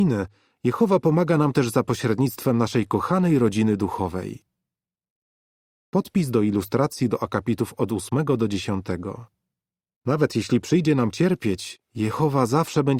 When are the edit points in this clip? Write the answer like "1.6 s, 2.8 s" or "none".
none